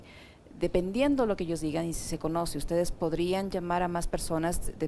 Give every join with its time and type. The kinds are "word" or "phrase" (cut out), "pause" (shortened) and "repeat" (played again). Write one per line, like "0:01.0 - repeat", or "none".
none